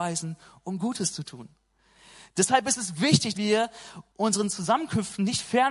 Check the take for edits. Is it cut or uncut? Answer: cut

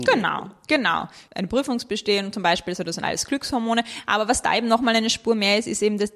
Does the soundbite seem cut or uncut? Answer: uncut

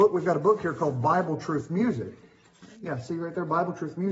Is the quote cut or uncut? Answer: uncut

